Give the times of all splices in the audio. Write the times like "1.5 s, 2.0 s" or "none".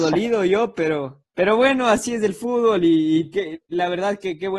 1.3 s